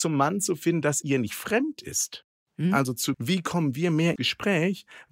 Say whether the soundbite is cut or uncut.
cut